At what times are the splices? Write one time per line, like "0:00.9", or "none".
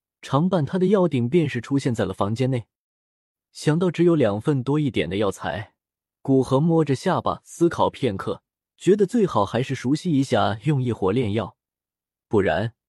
0:08.6